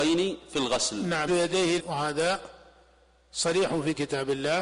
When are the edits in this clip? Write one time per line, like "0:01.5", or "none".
0:01.3
0:01.8